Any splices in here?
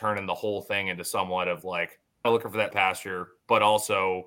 yes; 2 cuts; at 2.2 s, 2.7 s

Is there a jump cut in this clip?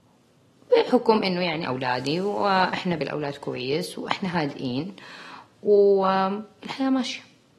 yes; 2 cuts; at 1.6 s, 3.0 s

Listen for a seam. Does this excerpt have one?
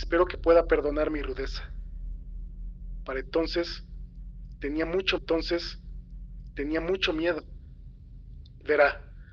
yes; 1 cut; at 5.2 s

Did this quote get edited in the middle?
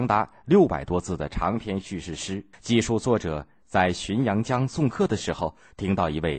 yes; 1 cut; at 2.5 s

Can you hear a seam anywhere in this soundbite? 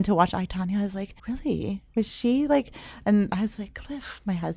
yes; 1 cut; at 1.2 s

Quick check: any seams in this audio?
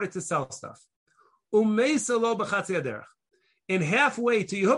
no; 0 cuts

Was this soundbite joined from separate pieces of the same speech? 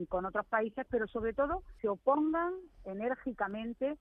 yes; 1 cut; at 1.8 s

